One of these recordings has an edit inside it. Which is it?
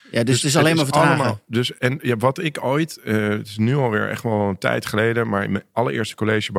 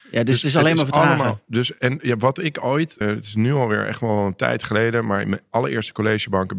second; 1 cut; at 3.0 s

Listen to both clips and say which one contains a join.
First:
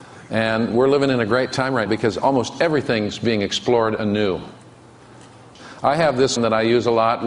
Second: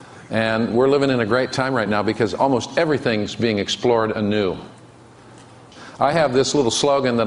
first; 2 cuts; at 1.9 s, 6.4 s

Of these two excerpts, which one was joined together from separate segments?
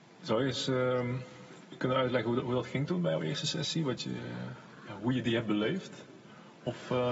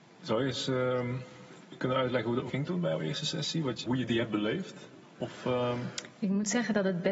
second; 3 cuts; at 2.5 s, 3.8 s, 5.0 s

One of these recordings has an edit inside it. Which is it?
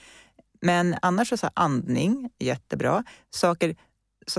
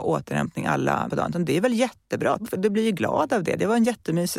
second; 2 cuts; at 1.1 s, 2.4 s

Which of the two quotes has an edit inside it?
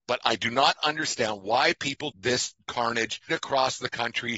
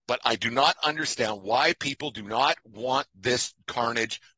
first; 2 cuts; at 2.1 s, 3.3 s

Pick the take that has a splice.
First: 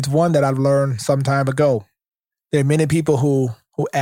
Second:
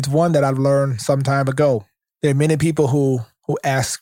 second; 1 cut; at 2.0 s

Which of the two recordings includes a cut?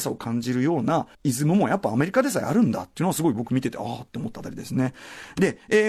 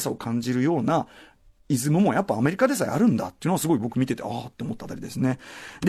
first; 1 cut; at 1.1 s

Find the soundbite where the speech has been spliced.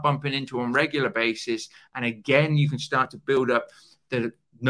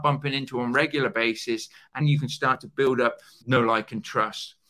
second; 2 cuts; at 2.0 s, 3.4 s

